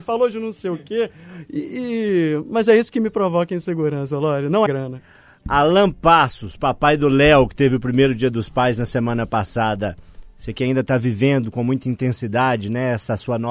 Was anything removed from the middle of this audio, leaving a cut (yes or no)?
yes